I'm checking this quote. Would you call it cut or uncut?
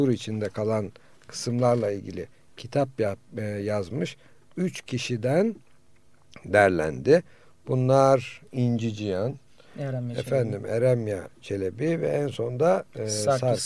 uncut